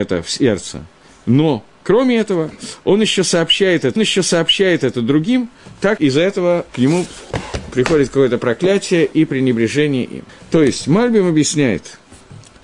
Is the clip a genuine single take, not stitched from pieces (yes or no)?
no